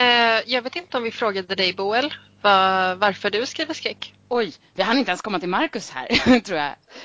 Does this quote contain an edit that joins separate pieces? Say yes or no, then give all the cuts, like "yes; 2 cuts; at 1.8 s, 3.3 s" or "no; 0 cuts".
yes; 1 cut; at 4.2 s